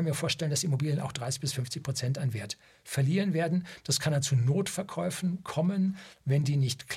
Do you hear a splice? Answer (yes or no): no